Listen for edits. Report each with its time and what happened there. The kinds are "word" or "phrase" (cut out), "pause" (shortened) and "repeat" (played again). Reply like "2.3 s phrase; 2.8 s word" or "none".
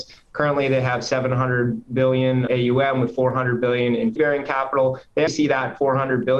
2.5 s word; 4.2 s word; 5.3 s word